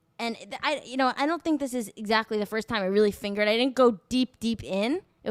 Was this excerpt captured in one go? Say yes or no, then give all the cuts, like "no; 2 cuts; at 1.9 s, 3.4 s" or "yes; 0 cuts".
yes; 0 cuts